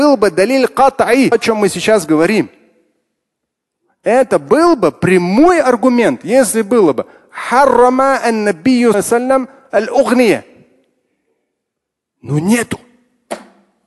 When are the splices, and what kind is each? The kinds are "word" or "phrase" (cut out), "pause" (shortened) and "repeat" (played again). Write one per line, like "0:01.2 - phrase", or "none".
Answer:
0:01.3 - word
0:08.9 - word